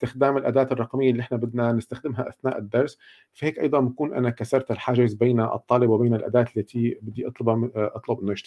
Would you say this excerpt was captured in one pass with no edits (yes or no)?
yes